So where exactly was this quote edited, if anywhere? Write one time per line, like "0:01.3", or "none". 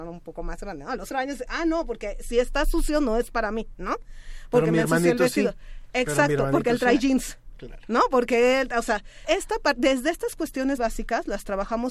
0:01.1
0:09.2
0:10.8